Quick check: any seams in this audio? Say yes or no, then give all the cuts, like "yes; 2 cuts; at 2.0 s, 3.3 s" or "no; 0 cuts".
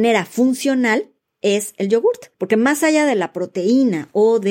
yes; 1 cut; at 2.3 s